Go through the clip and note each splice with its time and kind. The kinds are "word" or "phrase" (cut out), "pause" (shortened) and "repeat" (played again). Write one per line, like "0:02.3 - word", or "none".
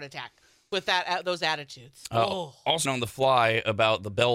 0:02.9 - phrase